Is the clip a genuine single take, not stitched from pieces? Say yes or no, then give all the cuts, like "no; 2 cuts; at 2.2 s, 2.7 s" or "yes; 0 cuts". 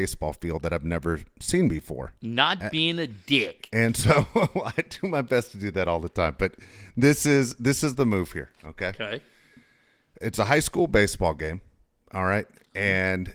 yes; 0 cuts